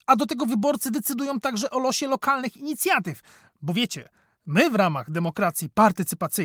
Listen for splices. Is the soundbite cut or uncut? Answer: uncut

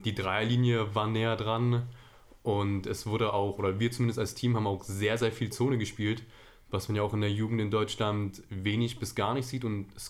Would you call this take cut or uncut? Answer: uncut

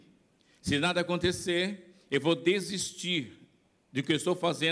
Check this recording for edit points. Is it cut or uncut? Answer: uncut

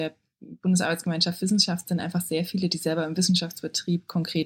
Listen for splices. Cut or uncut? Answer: uncut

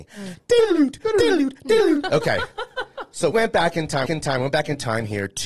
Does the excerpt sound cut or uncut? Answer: cut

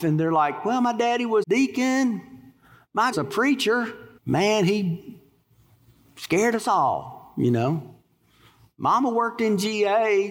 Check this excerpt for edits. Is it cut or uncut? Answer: cut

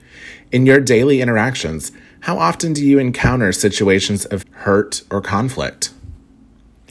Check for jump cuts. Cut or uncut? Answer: cut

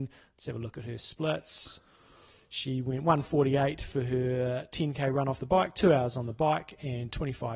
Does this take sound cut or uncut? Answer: uncut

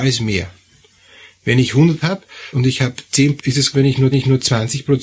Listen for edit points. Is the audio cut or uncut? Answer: cut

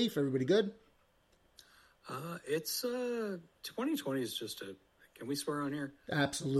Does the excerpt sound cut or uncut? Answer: uncut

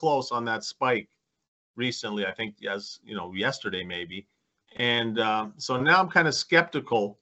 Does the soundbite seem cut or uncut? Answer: uncut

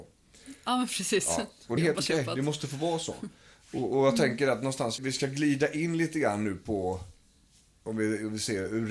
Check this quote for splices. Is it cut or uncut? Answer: cut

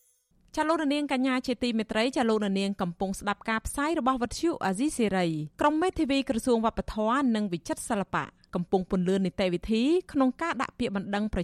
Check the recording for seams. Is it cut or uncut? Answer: cut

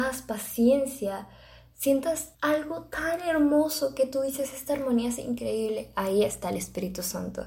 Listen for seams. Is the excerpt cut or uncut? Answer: cut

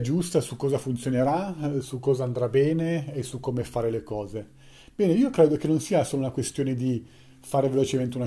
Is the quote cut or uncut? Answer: uncut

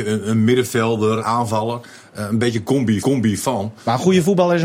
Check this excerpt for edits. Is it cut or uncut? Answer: cut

